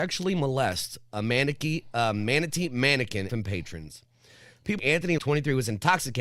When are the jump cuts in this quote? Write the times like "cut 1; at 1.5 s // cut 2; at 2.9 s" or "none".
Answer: cut 1; at 3.3 s // cut 2; at 4.8 s // cut 3; at 5.2 s